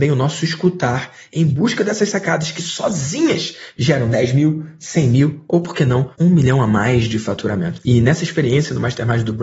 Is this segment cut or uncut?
cut